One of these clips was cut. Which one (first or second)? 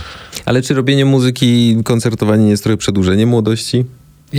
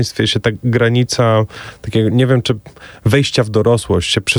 second